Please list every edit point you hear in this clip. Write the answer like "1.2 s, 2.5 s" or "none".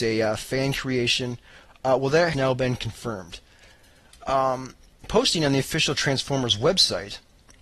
2.3 s, 5.0 s